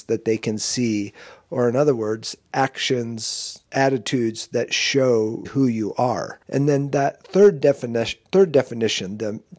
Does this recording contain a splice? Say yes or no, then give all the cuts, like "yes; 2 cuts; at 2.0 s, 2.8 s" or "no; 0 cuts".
yes; 4 cuts; at 3.7 s, 5.4 s, 6.4 s, 8.3 s